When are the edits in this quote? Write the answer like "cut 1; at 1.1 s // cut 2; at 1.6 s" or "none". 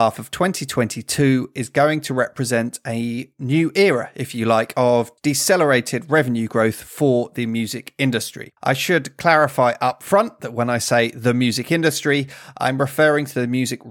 cut 1; at 8.6 s